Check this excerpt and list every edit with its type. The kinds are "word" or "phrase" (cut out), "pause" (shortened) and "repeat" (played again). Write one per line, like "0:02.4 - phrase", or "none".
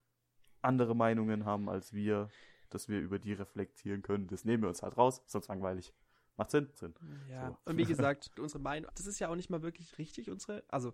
0:05.5 - phrase
0:06.7 - word
0:08.3 - word
0:08.9 - word